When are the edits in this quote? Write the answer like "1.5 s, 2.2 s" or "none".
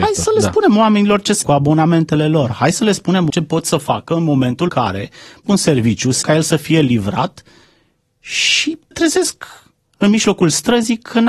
1.4 s, 3.3 s, 4.7 s, 5.4 s, 6.2 s, 8.9 s